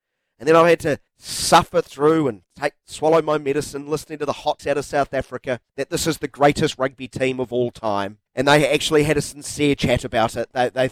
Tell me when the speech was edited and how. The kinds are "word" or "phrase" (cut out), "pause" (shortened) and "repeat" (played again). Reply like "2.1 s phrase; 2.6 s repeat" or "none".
1.1 s pause; 4.6 s word; 5.7 s pause; 8.3 s pause

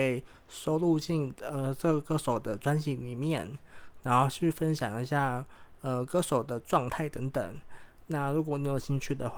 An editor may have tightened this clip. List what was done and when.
none

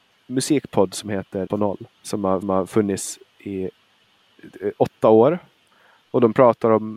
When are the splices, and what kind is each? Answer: 1.5 s word; 1.9 s pause; 2.4 s repeat

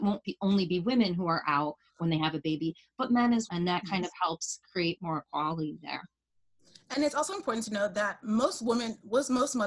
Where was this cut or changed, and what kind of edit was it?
3.5 s word; 5.0 s word

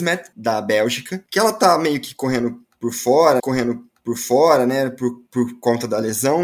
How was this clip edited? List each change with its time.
3.4 s repeat

